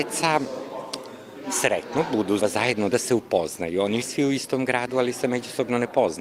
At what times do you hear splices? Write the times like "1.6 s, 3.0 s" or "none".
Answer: 2.4 s, 2.9 s, 4.0 s